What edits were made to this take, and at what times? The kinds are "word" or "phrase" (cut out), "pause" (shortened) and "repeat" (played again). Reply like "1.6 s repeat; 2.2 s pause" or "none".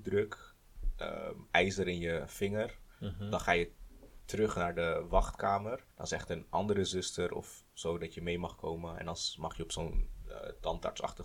5.9 s pause

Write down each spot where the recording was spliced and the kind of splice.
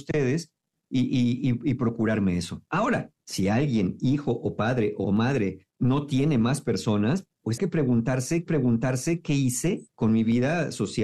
3.2 s pause; 5.0 s phrase; 5.7 s pause; 7.6 s word; 8.5 s repeat; 9.9 s pause

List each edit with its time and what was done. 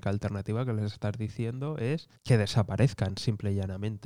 2.2 s pause

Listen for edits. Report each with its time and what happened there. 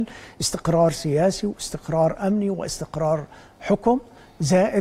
none

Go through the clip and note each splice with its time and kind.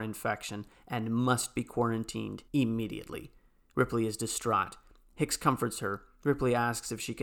2.5 s pause

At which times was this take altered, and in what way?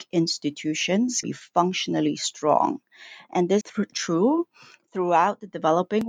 1.2 s word; 3.6 s word; 3.9 s word

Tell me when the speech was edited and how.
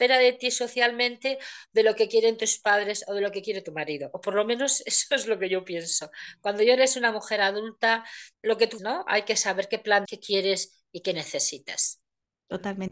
8.3 s pause; 8.8 s word; 10.1 s phrase

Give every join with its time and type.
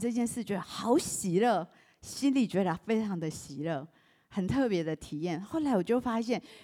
none

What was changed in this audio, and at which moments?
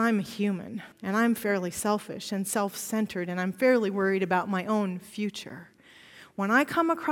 0.9 s pause

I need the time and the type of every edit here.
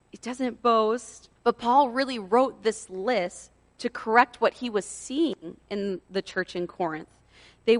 1.4 s pause

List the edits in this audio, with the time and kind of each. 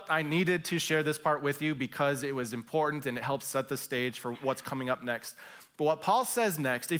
none

